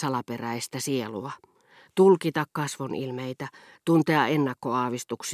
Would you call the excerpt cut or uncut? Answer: uncut